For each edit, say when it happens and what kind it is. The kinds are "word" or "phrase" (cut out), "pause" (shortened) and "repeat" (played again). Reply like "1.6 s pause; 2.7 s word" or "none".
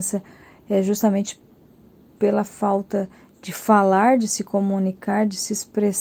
none